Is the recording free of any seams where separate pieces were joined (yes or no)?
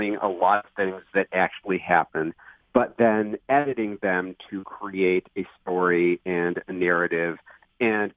yes